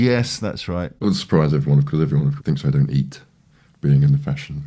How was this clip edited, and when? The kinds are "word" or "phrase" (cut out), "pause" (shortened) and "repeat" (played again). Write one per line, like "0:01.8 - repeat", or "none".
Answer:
0:01.0 - word
0:01.9 - word
0:02.4 - word

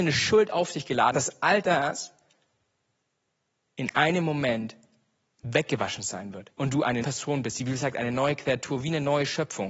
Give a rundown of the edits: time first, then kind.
0:01.1 - word
0:06.5 - pause
0:07.0 - word

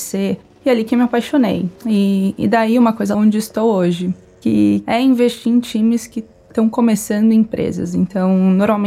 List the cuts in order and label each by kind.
0:01.8 - pause
0:03.1 - phrase

